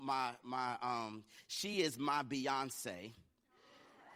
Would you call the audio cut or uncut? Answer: uncut